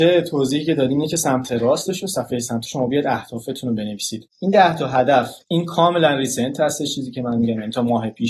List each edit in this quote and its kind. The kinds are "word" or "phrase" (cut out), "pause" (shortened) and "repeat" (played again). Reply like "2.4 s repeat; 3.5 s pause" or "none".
2.7 s word; 5.4 s pause